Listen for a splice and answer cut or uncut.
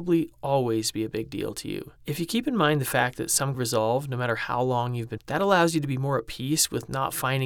cut